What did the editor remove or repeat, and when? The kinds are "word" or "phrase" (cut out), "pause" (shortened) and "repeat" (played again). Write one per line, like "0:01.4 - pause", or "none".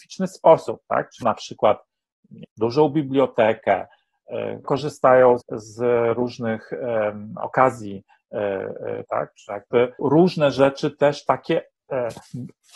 0:01.2 - word
0:02.4 - word
0:04.6 - word
0:05.4 - word
0:09.0 - word
0:10.0 - word